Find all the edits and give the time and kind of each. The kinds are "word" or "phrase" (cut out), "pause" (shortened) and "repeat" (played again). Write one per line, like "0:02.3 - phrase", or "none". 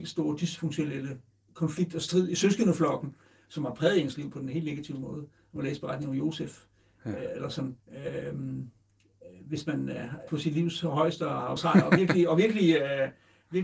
0:07.8 - pause
0:10.3 - word
0:11.6 - phrase